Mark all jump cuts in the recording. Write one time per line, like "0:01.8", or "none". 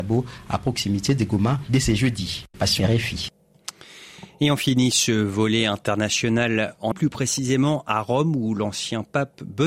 0:02.8
0:06.9